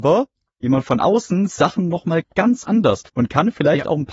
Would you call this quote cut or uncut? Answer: cut